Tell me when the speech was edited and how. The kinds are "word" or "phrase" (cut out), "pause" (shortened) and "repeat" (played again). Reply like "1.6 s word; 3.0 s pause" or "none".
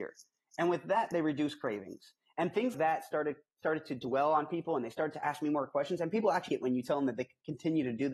2.7 s word; 6.5 s word

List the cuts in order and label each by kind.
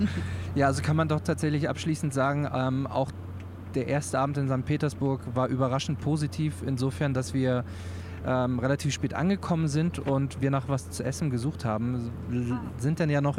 none

